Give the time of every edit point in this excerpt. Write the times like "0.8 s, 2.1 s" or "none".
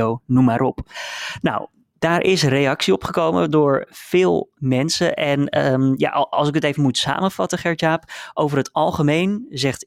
none